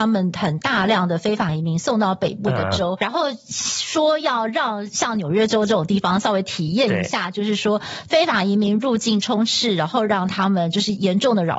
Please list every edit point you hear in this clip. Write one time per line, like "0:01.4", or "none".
0:03.0